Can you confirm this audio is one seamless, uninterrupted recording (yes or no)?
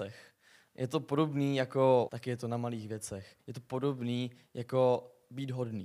no